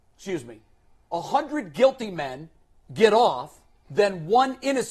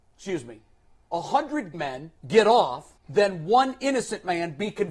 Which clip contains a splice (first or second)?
second